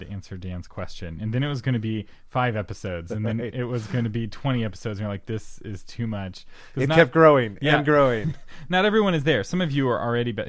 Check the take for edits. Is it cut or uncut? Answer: uncut